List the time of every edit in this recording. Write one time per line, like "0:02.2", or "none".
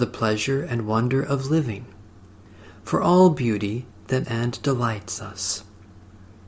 0:04.2